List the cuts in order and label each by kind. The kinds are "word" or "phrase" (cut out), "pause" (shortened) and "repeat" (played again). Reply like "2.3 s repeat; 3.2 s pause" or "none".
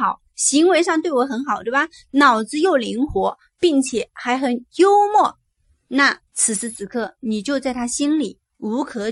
6.3 s pause